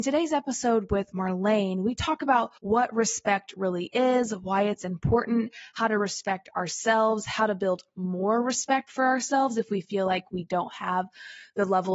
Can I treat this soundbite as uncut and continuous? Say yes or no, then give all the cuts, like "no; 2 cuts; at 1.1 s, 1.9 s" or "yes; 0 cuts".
no; 1 cut; at 2.6 s